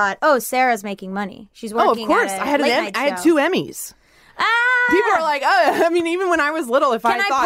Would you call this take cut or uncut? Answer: cut